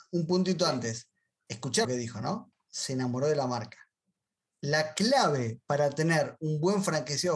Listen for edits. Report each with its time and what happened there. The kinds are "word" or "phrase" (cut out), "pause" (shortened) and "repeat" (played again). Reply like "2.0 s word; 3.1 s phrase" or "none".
1.8 s word